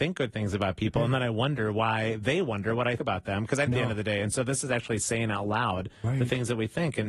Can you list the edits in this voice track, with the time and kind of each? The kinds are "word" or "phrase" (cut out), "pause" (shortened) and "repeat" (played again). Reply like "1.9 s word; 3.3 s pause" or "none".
3.0 s word; 3.7 s phrase